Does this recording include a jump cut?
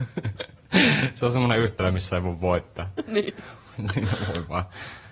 no; 0 cuts

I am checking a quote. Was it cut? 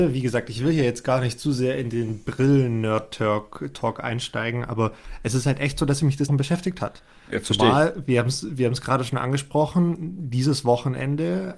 yes; 1 cut; at 6.3 s

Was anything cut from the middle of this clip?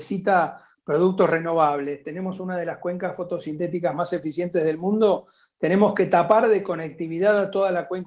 no; 0 cuts

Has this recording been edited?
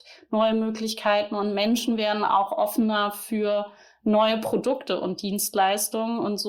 no; 0 cuts

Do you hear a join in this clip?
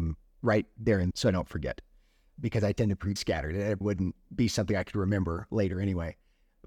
yes; 3 cuts; at 1.1 s, 3.2 s, 3.8 s

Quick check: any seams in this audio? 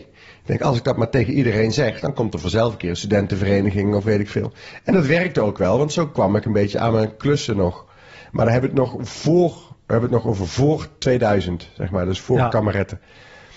no; 0 cuts

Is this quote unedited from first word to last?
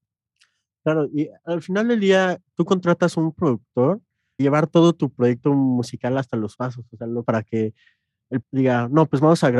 no; 4 cuts; at 4.4 s, 6.5 s, 7.2 s, 8.4 s

